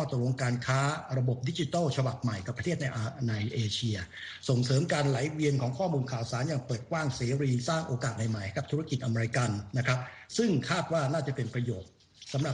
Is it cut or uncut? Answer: cut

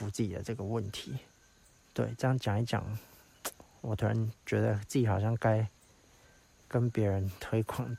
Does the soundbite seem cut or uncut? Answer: cut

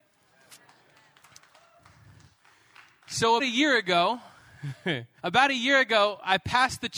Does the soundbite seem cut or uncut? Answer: cut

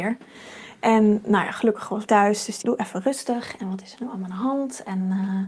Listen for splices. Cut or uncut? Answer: cut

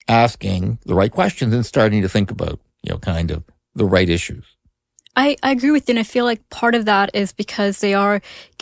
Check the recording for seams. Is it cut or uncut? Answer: uncut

